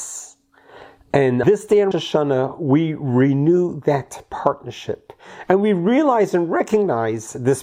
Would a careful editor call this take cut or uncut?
cut